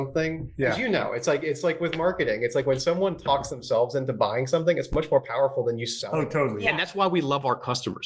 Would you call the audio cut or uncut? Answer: uncut